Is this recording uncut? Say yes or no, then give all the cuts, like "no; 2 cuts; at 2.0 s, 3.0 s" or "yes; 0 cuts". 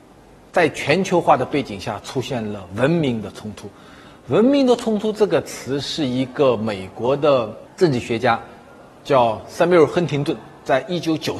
yes; 0 cuts